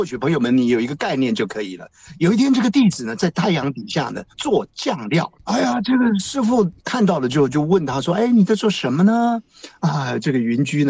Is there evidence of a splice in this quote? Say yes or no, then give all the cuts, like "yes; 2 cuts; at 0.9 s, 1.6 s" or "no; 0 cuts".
yes; 3 cuts; at 4.3 s, 5.3 s, 6.8 s